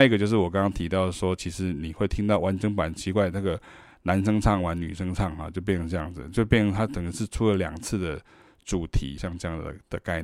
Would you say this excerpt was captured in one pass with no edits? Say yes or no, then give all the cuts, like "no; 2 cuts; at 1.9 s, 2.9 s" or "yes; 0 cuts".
no; 1 cut; at 9.2 s